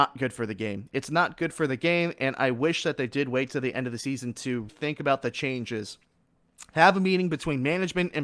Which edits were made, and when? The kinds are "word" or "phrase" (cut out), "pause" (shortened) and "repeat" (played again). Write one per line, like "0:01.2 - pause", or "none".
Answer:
0:04.7 - word